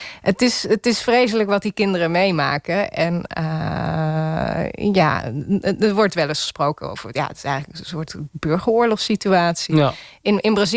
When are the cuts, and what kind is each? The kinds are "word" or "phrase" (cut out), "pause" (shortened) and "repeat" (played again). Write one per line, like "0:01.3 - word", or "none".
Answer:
none

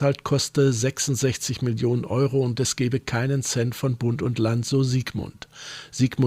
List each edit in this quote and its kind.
none

